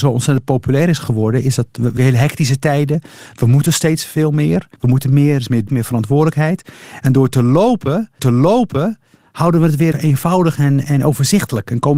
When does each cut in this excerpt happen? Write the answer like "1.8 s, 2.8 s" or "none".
2.0 s, 4.8 s, 5.7 s, 8.2 s, 9.9 s, 10.8 s